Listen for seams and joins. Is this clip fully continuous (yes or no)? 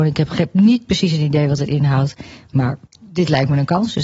no